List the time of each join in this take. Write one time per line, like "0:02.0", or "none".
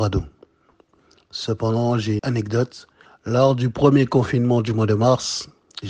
0:02.2
0:03.1